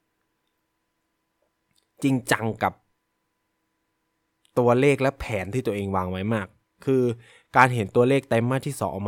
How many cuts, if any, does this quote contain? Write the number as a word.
zero